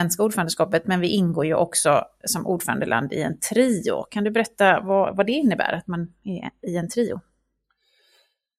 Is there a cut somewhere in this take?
no; 0 cuts

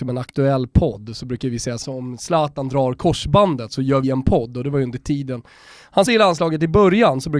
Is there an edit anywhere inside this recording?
yes; 3 cuts; at 1.8 s, 4.0 s, 6.1 s

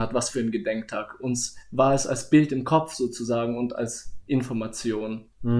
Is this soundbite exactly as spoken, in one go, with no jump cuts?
yes; 0 cuts

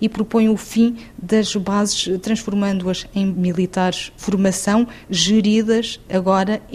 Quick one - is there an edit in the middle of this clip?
yes; 3 cuts; at 2.2 s, 3.3 s, 4.2 s

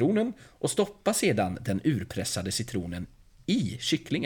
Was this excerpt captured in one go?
yes; 0 cuts

